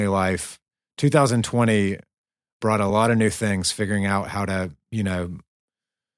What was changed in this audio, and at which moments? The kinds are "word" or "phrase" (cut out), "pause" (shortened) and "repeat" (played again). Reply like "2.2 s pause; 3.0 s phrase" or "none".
none